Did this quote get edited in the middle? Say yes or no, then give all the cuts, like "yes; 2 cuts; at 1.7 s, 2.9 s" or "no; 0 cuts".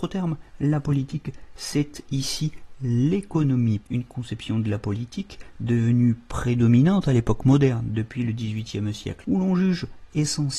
yes; 1 cut; at 3.8 s